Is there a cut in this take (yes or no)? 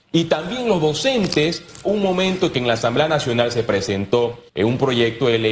yes